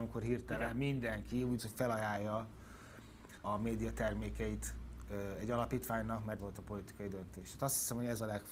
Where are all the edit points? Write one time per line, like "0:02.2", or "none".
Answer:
0:01.6
0:03.4
0:06.4